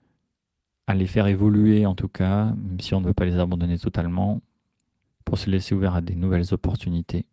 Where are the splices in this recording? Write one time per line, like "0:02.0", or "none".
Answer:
0:05.0